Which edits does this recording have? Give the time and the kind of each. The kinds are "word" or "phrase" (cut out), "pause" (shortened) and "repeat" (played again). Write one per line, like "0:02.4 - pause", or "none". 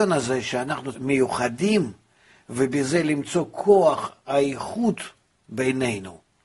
0:00.9 - phrase